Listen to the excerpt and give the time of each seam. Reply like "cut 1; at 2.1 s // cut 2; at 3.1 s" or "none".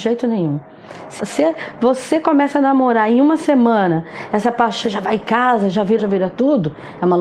cut 1; at 1.2 s // cut 2; at 4.8 s // cut 3; at 6.0 s